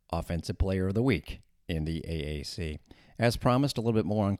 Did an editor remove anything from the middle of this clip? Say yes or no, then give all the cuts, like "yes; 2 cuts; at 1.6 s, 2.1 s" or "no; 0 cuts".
no; 0 cuts